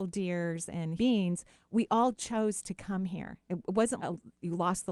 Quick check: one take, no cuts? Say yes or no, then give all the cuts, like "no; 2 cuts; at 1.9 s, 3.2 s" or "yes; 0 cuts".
no; 2 cuts; at 1.0 s, 4.0 s